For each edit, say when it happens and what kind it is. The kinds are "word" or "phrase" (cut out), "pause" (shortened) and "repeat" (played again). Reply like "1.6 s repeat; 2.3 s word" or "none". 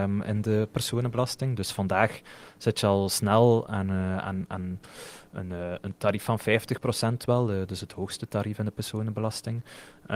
none